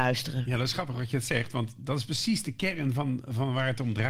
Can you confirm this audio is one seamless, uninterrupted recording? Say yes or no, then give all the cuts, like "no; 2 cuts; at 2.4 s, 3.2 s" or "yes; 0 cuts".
yes; 0 cuts